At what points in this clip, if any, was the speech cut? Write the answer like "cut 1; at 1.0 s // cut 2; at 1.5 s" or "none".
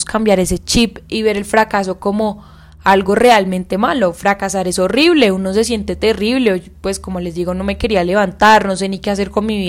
none